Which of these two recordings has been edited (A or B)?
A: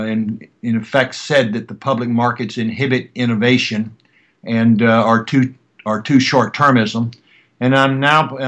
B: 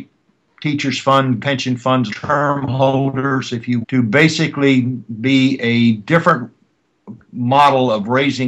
B